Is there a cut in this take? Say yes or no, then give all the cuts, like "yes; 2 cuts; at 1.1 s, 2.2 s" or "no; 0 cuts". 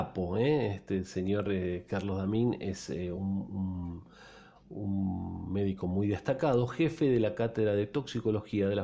no; 0 cuts